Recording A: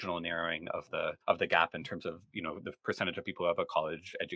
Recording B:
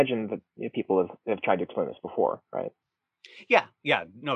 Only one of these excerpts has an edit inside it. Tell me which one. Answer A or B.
A